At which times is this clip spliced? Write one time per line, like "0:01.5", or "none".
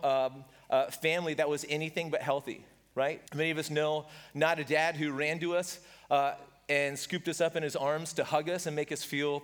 0:03.3